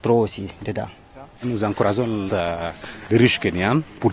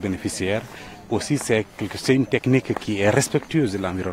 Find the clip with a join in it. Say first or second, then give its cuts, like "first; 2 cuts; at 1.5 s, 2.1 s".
first; 3 cuts; at 1.4 s, 2.3 s, 3.1 s